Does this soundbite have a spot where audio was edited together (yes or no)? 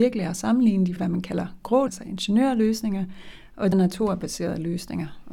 yes